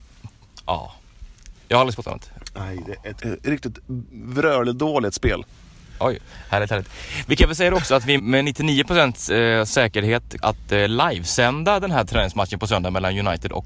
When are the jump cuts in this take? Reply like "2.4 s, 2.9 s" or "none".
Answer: 1.9 s, 3.2 s, 8.2 s, 10.4 s